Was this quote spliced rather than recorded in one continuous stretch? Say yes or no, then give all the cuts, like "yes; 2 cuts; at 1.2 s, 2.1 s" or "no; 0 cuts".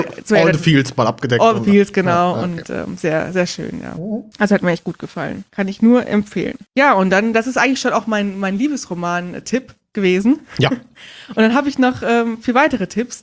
yes; 3 cuts; at 4.3 s, 5.5 s, 6.7 s